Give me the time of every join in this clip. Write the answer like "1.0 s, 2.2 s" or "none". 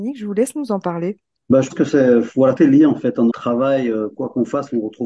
1.7 s, 2.6 s, 3.3 s